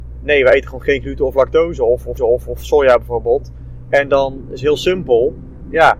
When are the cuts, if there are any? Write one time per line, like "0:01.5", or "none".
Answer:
0:02.2